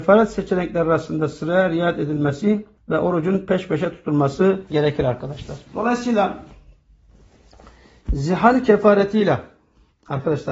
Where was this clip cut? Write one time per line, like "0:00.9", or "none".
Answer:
0:02.8
0:04.7
0:05.7